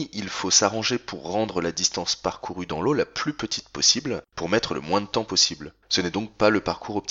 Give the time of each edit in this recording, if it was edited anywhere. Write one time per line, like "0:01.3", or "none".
0:04.3
0:05.8